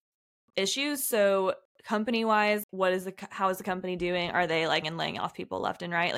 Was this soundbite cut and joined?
yes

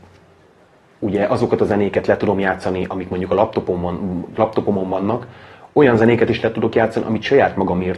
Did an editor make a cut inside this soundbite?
no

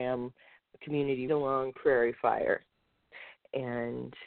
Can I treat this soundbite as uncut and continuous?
no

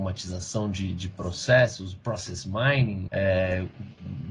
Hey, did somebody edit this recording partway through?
yes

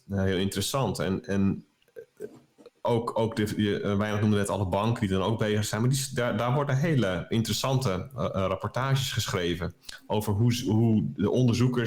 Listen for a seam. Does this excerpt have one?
no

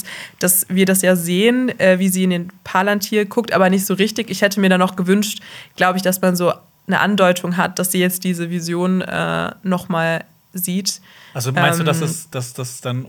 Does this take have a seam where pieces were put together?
no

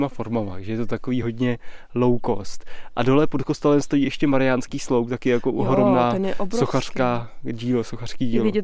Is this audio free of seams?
yes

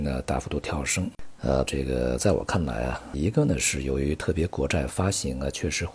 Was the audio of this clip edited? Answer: yes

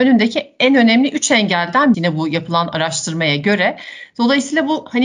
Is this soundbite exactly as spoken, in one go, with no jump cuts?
no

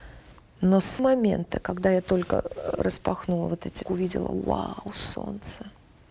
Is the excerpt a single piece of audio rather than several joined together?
no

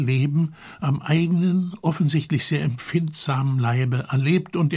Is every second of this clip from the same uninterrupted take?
yes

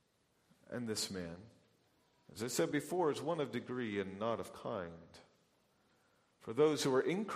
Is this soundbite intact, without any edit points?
yes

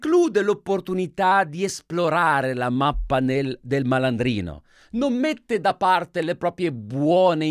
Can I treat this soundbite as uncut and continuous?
yes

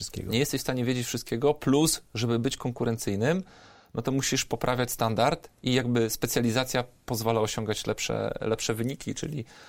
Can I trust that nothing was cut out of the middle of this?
yes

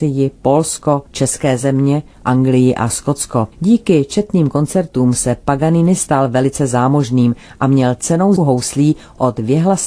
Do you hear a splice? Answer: yes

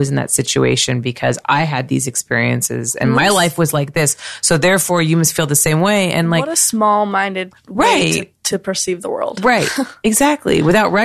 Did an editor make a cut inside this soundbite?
no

